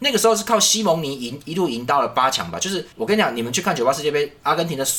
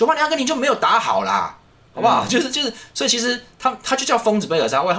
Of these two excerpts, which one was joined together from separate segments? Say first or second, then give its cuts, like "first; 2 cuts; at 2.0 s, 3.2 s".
first; 1 cut; at 2.9 s